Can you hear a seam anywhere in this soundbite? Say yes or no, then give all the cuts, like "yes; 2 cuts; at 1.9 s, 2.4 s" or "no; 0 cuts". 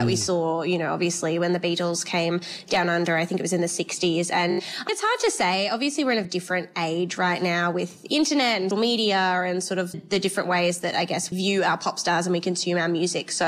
yes; 5 cuts; at 4.9 s, 6.2 s, 8.7 s, 9.9 s, 11.3 s